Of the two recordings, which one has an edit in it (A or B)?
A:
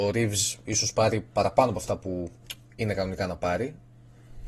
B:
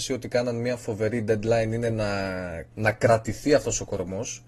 B